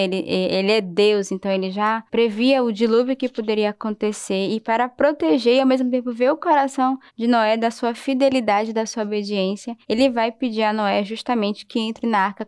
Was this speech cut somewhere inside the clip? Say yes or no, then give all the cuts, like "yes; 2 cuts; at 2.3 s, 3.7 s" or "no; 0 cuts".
yes; 3 cuts; at 2.1 s, 7.1 s, 9.8 s